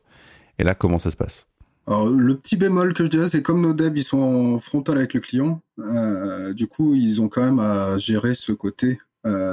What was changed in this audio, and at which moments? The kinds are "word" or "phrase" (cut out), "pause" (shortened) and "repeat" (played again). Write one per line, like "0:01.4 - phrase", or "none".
none